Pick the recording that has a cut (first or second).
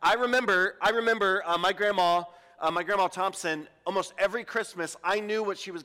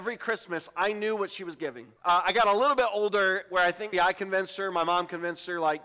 second